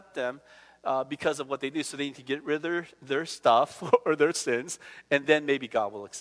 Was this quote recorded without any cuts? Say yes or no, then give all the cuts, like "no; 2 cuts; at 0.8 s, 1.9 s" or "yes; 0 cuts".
yes; 0 cuts